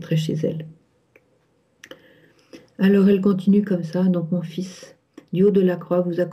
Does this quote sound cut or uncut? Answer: uncut